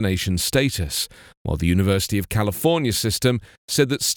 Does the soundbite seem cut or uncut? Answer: uncut